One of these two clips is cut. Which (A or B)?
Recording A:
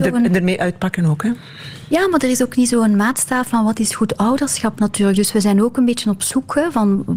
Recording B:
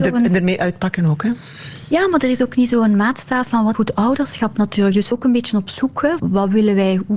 B